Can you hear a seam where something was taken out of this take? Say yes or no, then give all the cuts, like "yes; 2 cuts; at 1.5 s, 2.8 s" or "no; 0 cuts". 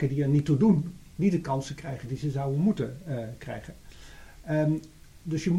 no; 0 cuts